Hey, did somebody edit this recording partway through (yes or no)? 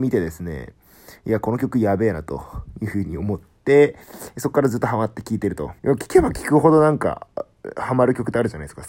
yes